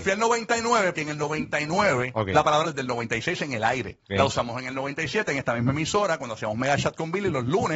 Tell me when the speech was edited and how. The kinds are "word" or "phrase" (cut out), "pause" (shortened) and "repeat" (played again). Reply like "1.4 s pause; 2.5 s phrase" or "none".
0.9 s word; 2.6 s phrase; 4.0 s pause

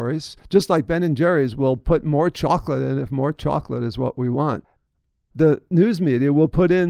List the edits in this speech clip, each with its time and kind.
none

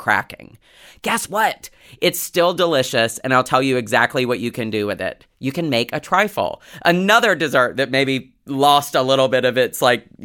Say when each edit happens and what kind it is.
none

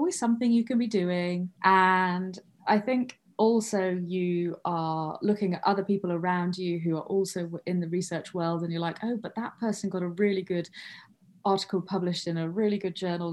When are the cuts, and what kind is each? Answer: 1.5 s pause

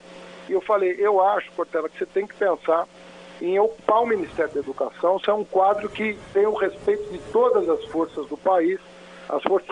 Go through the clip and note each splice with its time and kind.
none

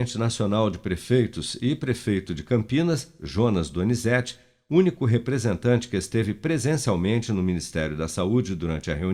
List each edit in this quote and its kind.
none

